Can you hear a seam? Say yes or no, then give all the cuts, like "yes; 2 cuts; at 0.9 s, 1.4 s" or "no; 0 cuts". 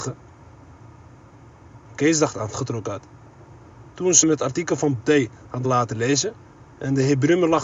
yes; 5 cuts; at 2.5 s, 3.9 s, 4.2 s, 5.0 s, 5.6 s